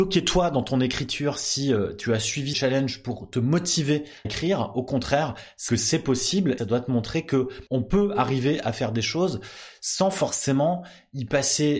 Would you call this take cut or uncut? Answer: cut